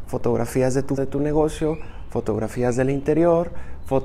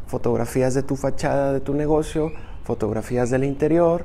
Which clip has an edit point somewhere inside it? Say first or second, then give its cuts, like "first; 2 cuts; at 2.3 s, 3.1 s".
first; 1 cut; at 1.0 s